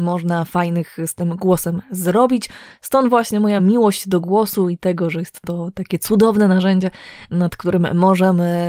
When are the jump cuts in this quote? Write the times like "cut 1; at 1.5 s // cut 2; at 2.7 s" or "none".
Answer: none